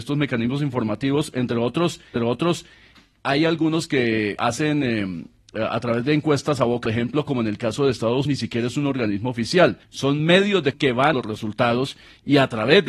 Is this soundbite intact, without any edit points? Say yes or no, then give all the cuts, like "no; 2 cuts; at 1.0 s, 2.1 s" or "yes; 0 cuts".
no; 7 cuts; at 2.2 s, 4.4 s, 6.9 s, 8.3 s, 9.8 s, 10.7 s, 11.1 s